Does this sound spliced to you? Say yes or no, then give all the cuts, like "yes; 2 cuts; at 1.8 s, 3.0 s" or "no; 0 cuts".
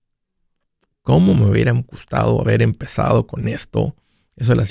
no; 0 cuts